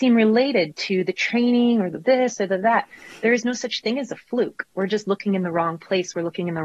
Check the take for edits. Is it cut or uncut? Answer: uncut